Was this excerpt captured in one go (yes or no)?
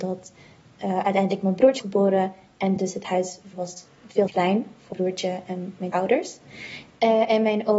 no